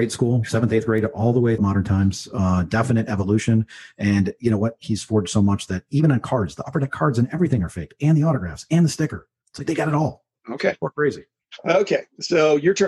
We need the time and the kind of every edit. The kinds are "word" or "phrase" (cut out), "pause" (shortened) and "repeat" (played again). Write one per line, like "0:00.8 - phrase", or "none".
0:01.6 - word

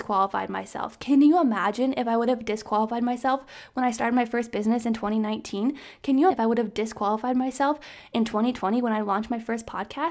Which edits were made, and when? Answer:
0:06.3 - word

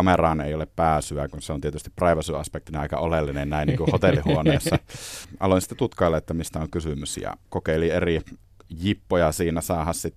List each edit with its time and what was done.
none

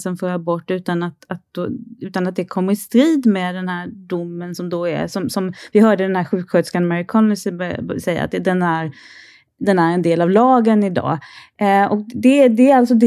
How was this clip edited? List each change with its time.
none

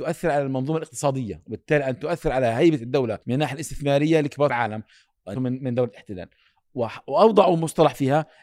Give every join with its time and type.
0:03.2 - pause
0:04.5 - word
0:05.3 - phrase

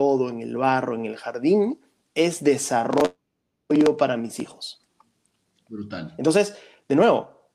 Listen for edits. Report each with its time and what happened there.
none

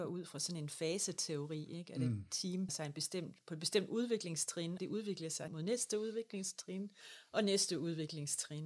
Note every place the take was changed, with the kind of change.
0:02.7 - word
0:04.8 - phrase
0:05.5 - word

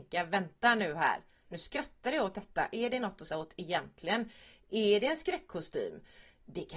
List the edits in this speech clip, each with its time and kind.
0:03.3 - word

